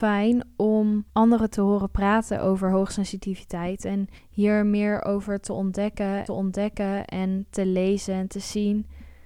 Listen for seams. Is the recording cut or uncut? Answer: cut